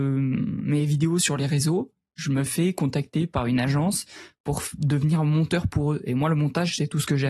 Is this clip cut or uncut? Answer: uncut